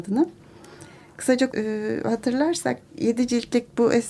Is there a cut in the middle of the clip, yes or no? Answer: yes